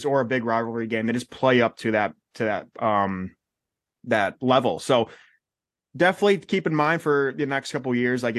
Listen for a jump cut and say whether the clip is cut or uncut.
uncut